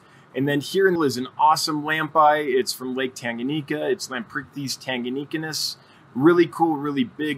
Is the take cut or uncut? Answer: cut